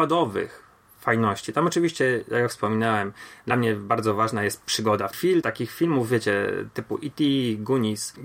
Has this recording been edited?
no; 0 cuts

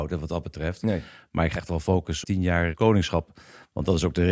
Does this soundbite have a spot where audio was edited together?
yes; 2 cuts; at 1.6 s, 2.2 s

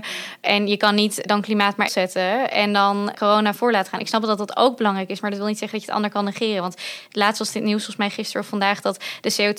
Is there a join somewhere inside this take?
yes; 1 cut; at 1.9 s

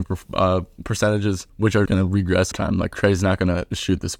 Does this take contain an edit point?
yes; 3 cuts; at 1.5 s, 1.9 s, 2.5 s

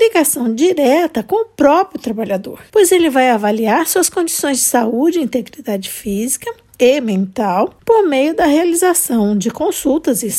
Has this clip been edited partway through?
no; 0 cuts

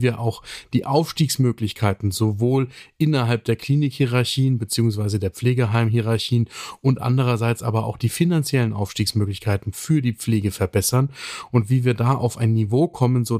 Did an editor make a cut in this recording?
no; 0 cuts

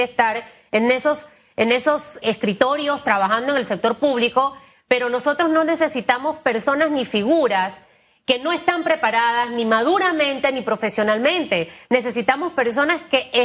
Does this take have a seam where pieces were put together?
yes; 1 cut; at 2.2 s

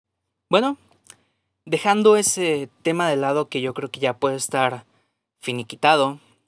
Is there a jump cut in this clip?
no; 0 cuts

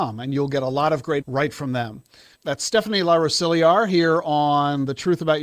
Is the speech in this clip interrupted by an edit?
yes; 1 cut; at 1.2 s

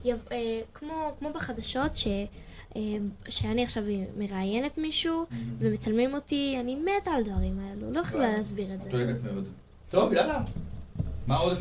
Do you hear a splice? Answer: no; 0 cuts

